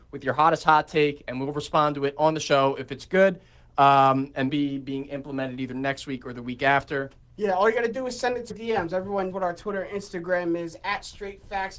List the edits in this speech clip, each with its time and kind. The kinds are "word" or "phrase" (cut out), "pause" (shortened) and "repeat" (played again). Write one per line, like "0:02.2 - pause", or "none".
0:04.5 - word
0:08.5 - word
0:09.3 - word